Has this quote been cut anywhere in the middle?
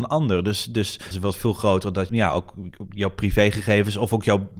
yes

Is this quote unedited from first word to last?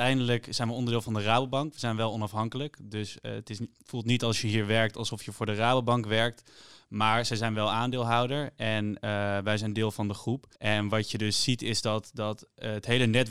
no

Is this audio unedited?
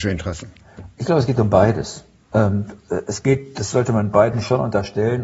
yes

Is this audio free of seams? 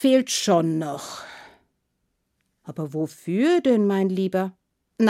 yes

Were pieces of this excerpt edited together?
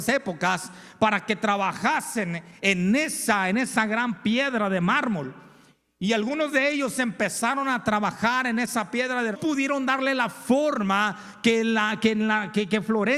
yes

